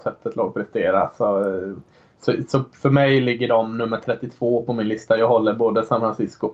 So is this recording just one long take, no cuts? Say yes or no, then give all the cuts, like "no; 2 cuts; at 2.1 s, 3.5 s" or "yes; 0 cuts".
yes; 0 cuts